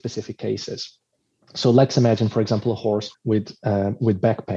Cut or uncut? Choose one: cut